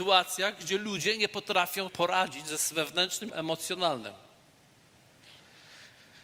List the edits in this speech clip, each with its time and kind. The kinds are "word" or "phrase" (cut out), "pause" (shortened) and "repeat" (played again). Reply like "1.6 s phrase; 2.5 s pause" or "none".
1.9 s word; 3.3 s word